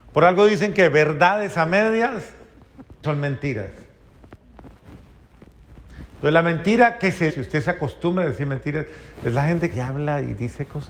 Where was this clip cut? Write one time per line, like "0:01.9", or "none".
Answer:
0:03.0
0:07.3
0:09.7